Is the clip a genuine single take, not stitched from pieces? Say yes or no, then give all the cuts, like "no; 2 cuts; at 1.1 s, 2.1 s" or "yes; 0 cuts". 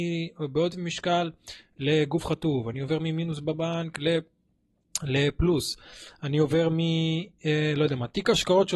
yes; 0 cuts